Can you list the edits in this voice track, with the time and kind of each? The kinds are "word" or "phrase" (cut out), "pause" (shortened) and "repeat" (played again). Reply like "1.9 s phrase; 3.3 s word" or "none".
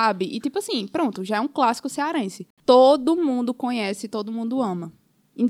none